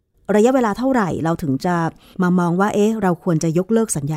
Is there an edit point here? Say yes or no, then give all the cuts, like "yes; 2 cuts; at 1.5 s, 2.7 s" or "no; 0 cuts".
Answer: no; 0 cuts